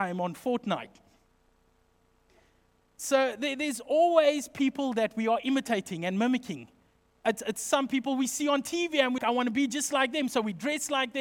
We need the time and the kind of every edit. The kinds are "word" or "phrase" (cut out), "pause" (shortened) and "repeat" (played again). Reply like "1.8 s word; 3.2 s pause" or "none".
9.2 s word